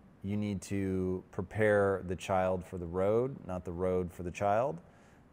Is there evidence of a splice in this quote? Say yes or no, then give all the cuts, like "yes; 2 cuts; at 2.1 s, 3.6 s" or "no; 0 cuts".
no; 0 cuts